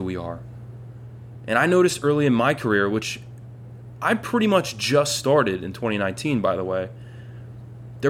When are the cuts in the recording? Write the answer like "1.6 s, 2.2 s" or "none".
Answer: none